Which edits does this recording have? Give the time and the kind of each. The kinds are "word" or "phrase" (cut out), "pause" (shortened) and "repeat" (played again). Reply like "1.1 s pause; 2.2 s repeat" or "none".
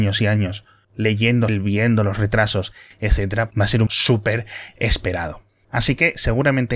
1.5 s word; 3.5 s word; 3.9 s word